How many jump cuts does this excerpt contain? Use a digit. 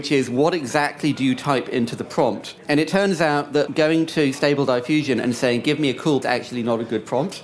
2